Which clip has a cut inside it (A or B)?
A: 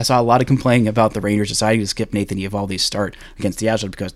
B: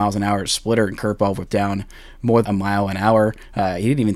B